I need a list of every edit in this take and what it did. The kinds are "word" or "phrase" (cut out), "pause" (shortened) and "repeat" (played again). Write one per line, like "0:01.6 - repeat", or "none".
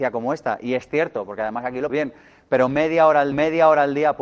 0:01.9 - word
0:03.3 - repeat